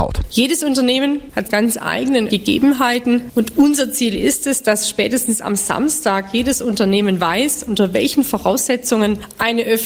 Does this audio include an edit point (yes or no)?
yes